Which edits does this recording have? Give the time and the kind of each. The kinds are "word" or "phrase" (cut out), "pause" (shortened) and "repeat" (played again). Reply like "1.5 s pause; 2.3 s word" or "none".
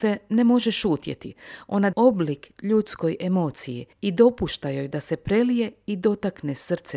1.9 s word; 3.9 s pause